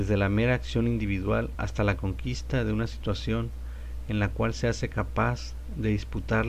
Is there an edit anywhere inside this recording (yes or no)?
no